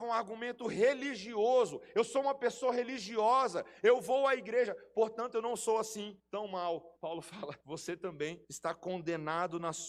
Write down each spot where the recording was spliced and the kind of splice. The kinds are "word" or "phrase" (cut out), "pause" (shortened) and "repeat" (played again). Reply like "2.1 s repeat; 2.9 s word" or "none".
6.2 s pause; 7.0 s pause; 7.6 s pause; 8.4 s pause